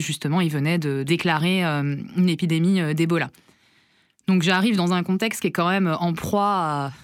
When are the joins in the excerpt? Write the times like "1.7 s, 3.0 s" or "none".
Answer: none